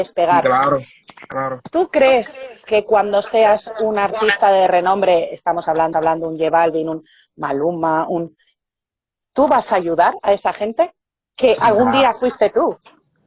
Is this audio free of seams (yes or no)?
no